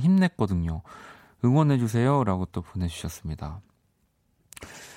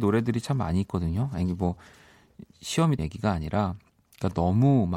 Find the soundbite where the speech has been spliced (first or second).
second